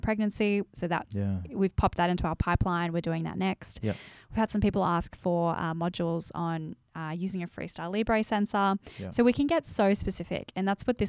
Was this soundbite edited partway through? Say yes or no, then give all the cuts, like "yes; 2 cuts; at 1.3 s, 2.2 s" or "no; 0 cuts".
no; 0 cuts